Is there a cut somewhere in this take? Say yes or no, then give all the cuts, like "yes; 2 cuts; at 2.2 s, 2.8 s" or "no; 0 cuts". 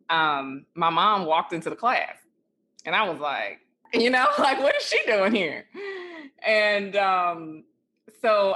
no; 0 cuts